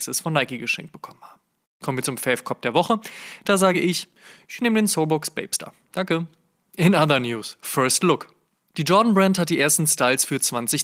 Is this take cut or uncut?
uncut